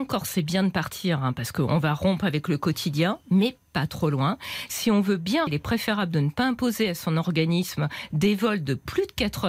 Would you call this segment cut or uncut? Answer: cut